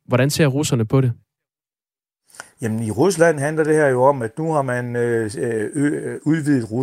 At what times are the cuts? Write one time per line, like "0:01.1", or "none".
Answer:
none